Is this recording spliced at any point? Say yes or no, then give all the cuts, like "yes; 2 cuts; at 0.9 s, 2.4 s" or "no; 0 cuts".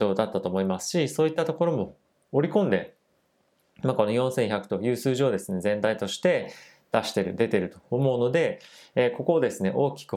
no; 0 cuts